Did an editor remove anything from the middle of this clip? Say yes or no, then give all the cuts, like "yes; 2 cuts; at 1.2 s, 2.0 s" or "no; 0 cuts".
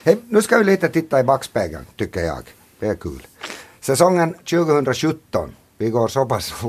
no; 0 cuts